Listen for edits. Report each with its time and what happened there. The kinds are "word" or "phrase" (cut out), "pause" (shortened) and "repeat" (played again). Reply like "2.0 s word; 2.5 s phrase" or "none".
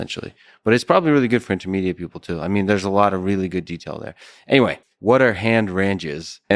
4.8 s pause